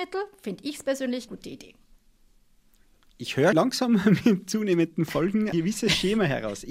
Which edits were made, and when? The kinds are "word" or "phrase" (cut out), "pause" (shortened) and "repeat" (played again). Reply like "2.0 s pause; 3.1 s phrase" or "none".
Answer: 1.3 s word; 3.5 s word; 5.5 s word